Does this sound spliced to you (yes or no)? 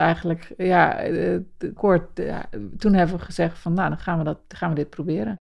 yes